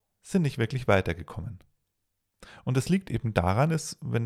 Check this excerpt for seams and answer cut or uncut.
uncut